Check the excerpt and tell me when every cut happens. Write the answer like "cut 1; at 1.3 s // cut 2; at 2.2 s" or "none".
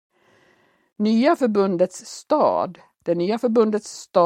none